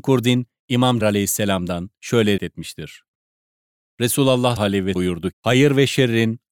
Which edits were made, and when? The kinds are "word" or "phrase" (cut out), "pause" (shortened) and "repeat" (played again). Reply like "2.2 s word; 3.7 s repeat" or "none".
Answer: 1.0 s word; 2.4 s word; 4.6 s word; 4.9 s word; 5.3 s word